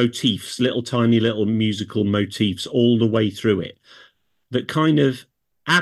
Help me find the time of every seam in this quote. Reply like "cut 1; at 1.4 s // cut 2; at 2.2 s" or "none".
none